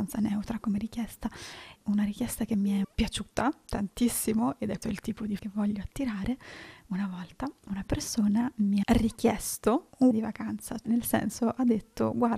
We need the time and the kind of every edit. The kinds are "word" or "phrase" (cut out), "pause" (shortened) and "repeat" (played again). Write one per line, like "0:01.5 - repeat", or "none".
0:02.8 - word
0:04.8 - word
0:05.4 - word
0:08.8 - word
0:10.1 - word
0:10.8 - word